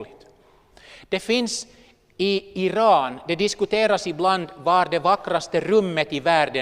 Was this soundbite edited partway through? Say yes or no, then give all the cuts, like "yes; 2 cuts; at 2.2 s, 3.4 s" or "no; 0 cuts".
no; 0 cuts